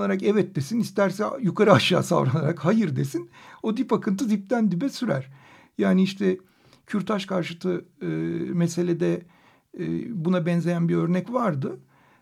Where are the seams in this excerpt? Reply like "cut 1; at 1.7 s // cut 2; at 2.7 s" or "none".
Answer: none